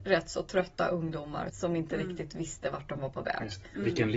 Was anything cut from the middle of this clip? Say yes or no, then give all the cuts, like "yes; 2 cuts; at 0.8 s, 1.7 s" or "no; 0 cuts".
yes; 1 cut; at 1.5 s